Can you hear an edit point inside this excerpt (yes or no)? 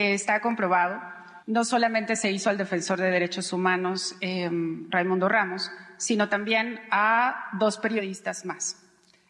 yes